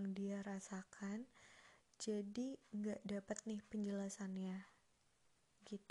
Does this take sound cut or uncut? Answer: uncut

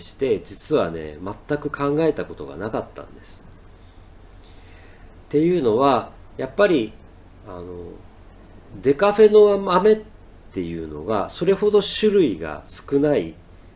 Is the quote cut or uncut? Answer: uncut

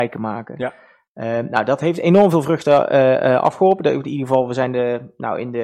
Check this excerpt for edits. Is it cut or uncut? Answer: uncut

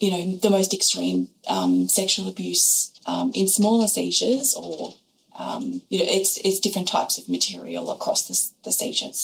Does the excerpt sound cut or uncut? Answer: cut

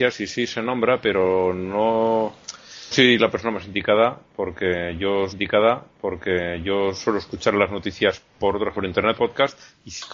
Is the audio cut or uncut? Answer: cut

